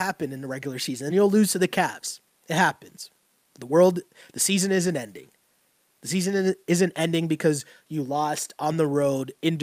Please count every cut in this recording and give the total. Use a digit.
0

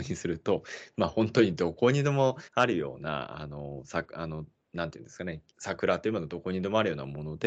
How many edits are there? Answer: 2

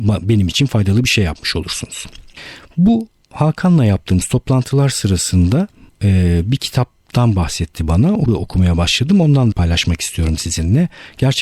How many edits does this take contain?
2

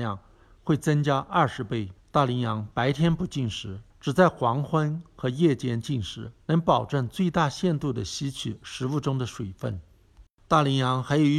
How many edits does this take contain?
4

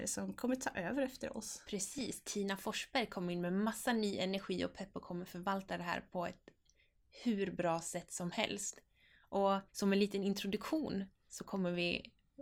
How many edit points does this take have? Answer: 1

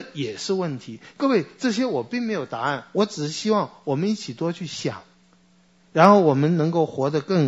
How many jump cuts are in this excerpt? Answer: 0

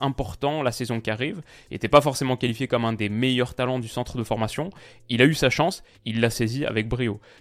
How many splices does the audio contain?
0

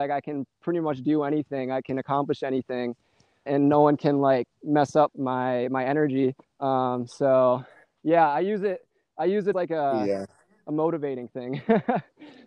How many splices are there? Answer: 4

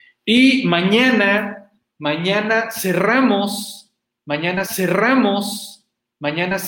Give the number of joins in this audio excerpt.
1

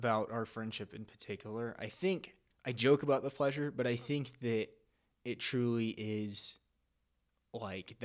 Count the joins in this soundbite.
0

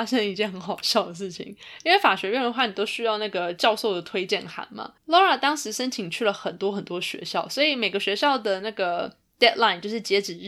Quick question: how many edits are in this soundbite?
1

